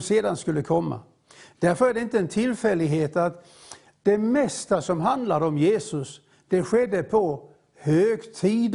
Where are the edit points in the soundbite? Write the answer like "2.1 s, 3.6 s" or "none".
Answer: none